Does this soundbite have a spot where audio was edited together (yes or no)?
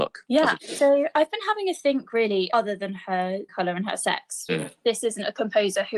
yes